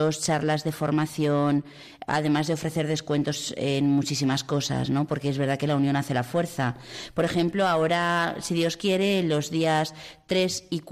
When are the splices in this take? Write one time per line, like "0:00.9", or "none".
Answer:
none